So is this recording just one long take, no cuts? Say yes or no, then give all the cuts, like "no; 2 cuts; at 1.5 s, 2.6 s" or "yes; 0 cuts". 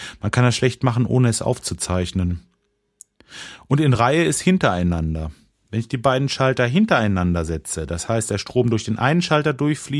yes; 0 cuts